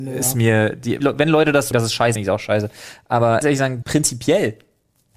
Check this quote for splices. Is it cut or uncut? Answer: cut